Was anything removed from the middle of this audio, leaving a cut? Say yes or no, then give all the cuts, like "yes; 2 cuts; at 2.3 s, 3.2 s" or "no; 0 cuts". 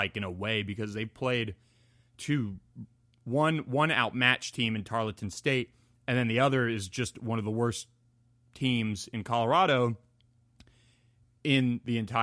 no; 0 cuts